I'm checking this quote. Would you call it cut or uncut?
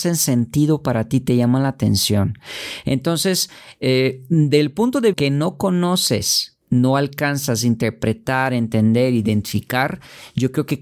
cut